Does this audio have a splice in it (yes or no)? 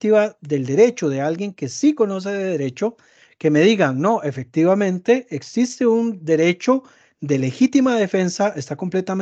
no